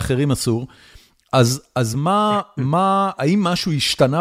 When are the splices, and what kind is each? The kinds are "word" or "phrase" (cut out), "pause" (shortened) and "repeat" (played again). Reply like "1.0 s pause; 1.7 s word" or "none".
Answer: none